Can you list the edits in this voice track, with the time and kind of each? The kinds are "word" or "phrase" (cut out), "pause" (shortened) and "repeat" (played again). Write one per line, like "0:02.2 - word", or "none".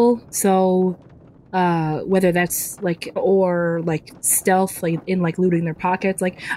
0:03.2 - word